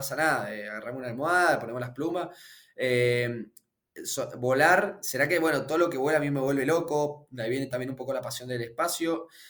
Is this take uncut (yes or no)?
yes